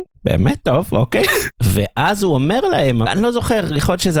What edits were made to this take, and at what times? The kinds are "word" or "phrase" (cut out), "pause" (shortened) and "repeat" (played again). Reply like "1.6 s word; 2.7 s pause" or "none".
none